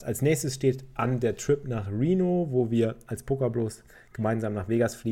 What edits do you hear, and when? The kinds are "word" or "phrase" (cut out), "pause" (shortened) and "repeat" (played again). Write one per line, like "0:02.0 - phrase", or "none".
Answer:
none